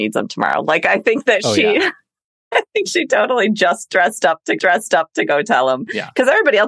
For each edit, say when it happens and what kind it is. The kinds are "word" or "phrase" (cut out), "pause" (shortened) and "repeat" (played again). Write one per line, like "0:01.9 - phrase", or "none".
0:04.6 - repeat

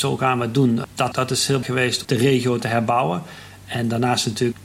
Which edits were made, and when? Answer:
0:01.1 - word
0:01.6 - word
0:02.0 - word

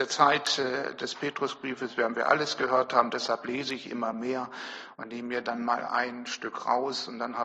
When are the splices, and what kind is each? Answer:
none

